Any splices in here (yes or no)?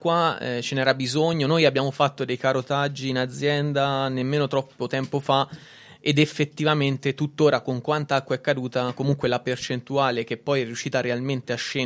no